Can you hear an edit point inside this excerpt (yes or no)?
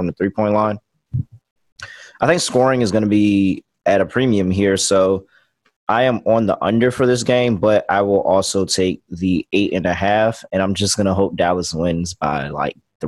no